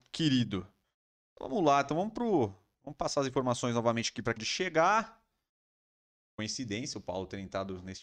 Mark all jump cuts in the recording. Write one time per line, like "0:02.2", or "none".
0:04.4